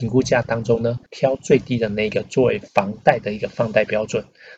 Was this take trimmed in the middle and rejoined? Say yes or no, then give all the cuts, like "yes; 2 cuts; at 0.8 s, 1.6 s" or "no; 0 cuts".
yes; 2 cuts; at 1.1 s, 2.7 s